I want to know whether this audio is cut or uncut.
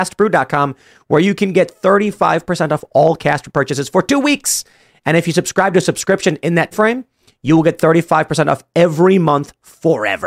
cut